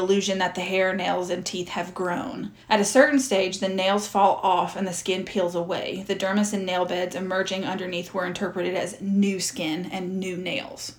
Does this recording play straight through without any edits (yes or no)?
no